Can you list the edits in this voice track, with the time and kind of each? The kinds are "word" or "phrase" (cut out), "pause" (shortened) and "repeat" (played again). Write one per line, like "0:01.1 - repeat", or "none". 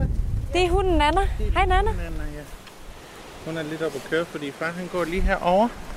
none

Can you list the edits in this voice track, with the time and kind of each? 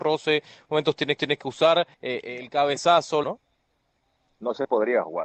0:01.2 - repeat
0:01.9 - pause
0:03.2 - phrase

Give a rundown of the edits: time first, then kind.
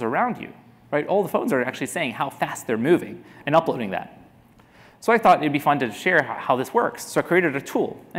none

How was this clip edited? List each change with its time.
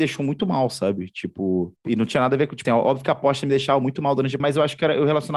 0:01.8 - pause
0:02.6 - word
0:04.4 - word

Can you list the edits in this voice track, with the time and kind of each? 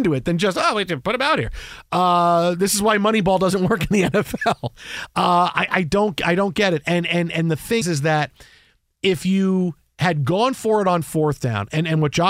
0:07.8 - word

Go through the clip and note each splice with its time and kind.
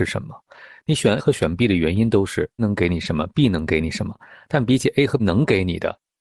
0:01.2 - word
0:02.6 - word
0:05.2 - word

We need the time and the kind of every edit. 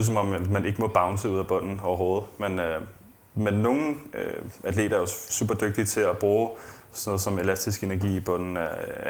none

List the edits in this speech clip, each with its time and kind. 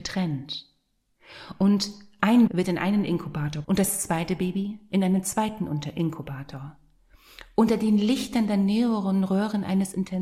0:02.5 - word
0:03.6 - word

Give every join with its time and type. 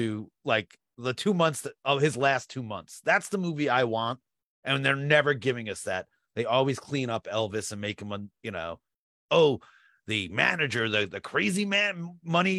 none

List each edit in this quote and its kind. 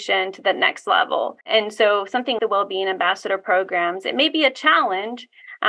0:01.4 - pause
0:02.4 - word

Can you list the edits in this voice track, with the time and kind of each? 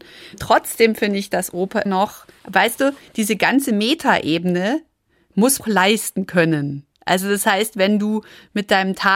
0:01.9 - word
0:02.4 - pause
0:05.6 - phrase
0:06.9 - pause

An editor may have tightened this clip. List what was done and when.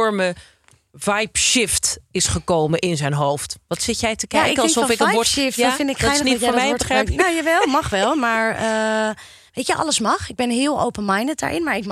none

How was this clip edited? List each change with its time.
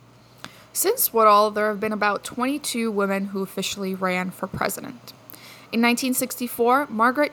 none

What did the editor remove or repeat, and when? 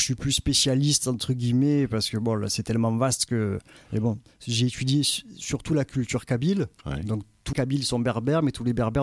0:07.5 - word

